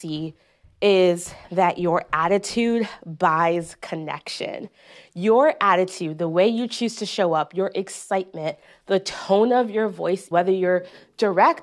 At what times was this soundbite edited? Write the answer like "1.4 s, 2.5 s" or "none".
10.3 s